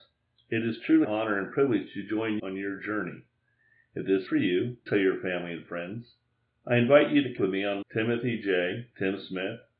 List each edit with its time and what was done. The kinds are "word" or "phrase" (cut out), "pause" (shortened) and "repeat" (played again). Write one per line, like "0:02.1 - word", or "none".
0:01.0 - word
0:02.4 - word
0:04.3 - word
0:04.9 - word
0:07.4 - word
0:07.8 - word